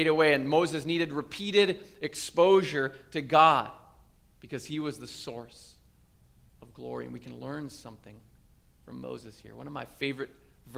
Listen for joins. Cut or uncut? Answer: uncut